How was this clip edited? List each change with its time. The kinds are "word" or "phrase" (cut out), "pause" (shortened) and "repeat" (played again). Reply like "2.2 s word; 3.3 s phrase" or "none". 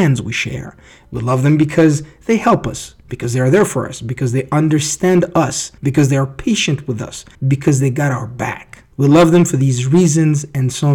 5.8 s pause; 7.3 s pause; 8.9 s pause